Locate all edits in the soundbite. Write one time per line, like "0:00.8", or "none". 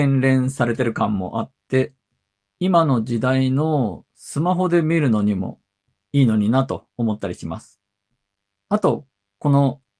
0:06.9